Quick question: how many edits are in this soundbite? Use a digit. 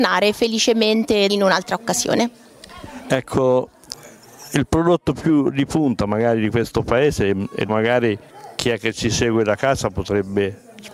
2